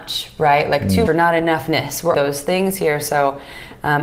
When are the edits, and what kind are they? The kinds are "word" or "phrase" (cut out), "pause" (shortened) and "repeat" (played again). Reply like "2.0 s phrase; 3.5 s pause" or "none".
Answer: 1.1 s word; 2.1 s phrase

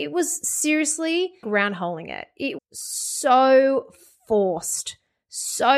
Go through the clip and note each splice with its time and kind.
1.4 s phrase; 2.6 s word

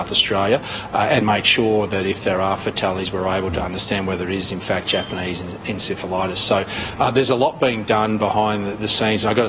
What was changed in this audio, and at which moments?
1.2 s word

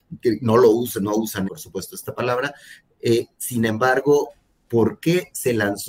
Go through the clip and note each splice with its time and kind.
1.5 s word

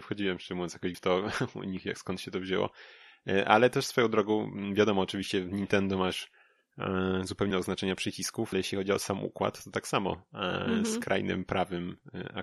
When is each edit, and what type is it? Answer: 0.9 s word; 7.5 s word; 8.5 s word

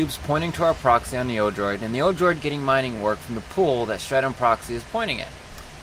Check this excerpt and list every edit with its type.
none

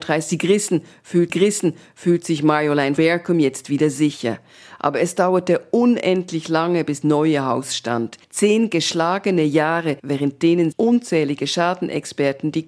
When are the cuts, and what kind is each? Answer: 1.3 s repeat; 3.0 s word; 7.0 s word; 8.2 s pause; 10.0 s pause; 10.7 s word

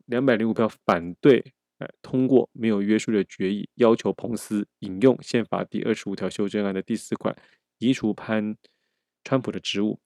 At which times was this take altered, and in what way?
none

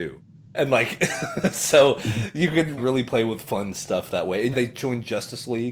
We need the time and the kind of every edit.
2.8 s word; 4.5 s word

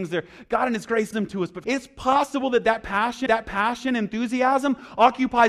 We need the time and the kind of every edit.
1.1 s word; 1.6 s word; 3.3 s repeat

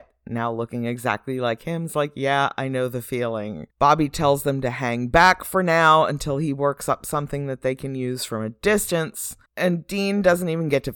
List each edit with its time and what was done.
3.7 s pause; 9.5 s pause

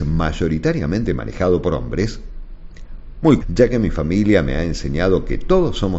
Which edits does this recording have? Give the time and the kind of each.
3.4 s word

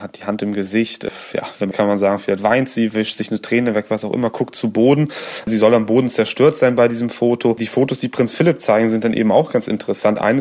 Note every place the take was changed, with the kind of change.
1.7 s phrase

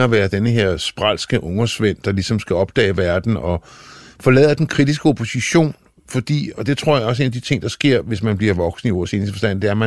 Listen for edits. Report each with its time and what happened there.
none

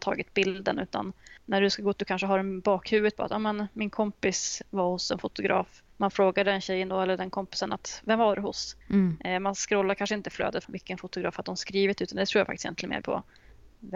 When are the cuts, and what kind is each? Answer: 1.4 s pause; 2.0 s phrase; 5.9 s pause; 8.8 s pause; 10.6 s phrase; 13.0 s phrase

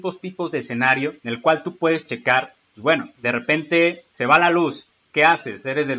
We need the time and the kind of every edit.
1.2 s pause; 3.1 s pause; 4.1 s pause

